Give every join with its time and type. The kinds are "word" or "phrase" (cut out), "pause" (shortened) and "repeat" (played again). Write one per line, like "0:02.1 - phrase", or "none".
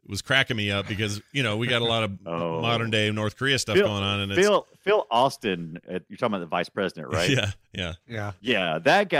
none